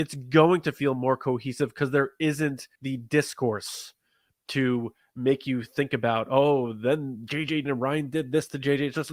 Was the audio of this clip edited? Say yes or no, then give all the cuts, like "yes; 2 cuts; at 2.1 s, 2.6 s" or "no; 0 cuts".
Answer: yes; 2 cuts; at 2.7 s, 7.6 s